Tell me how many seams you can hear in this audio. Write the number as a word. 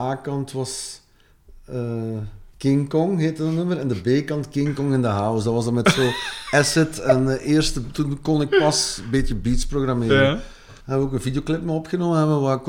two